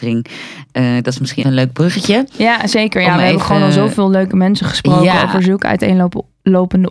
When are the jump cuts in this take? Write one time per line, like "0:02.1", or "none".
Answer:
0:01.4